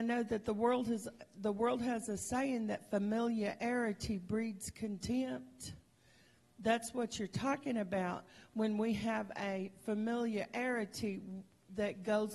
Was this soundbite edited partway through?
no; 0 cuts

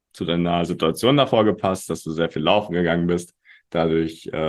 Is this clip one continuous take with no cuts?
yes; 0 cuts

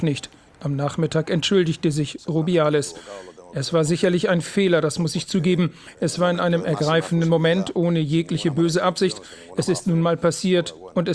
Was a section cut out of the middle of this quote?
no; 0 cuts

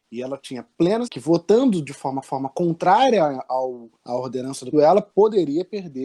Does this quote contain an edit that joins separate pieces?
yes; 4 cuts; at 1.1 s, 2.2 s, 4.0 s, 4.7 s

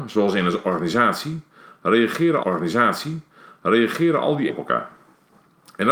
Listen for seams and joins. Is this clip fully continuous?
no; 2 cuts; at 2.4 s, 4.5 s

